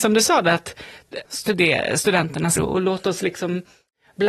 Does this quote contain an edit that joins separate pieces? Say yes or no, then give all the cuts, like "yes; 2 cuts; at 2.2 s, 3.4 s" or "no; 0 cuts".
yes; 2 cuts; at 1.2 s, 2.6 s